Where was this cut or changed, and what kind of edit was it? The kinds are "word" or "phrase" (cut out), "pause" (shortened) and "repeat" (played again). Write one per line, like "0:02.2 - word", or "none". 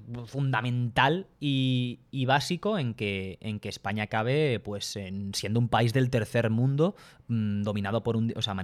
none

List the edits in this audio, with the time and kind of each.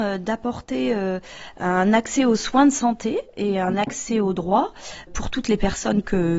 0:05.1 - word

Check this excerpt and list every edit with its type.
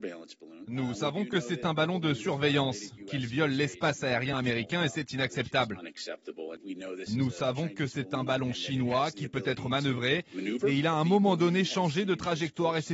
none

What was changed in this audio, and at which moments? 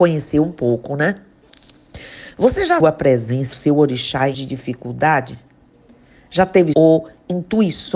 0:02.8 - word
0:03.5 - word
0:04.3 - word
0:06.7 - word

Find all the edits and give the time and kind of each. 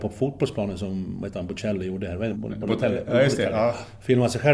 0:02.3 - word

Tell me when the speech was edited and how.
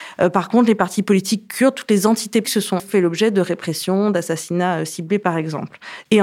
0:02.4 - word
0:02.8 - word

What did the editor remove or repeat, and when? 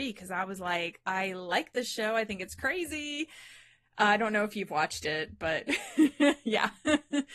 none

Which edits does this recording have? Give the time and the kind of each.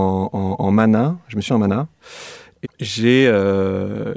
0:01.5 - word
0:02.6 - word

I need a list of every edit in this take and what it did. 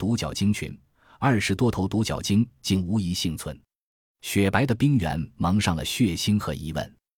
none

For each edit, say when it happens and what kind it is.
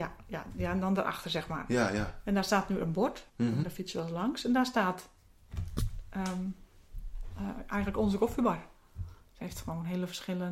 0:03.3 - pause

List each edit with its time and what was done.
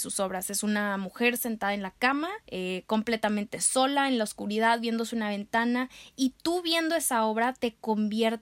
0:02.4 - pause

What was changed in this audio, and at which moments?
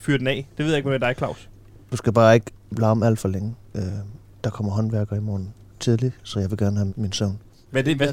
0:06.9 - word

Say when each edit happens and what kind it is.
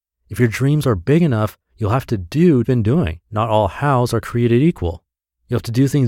0:01.7 - pause
0:02.6 - phrase
0:03.2 - pause

